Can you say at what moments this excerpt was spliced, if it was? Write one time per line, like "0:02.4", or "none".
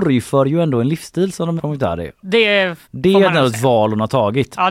0:01.6
0:02.8